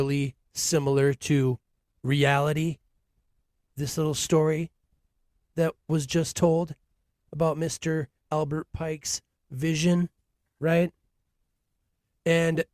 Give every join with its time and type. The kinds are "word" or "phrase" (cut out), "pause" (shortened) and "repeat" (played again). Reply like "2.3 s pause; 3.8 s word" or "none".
none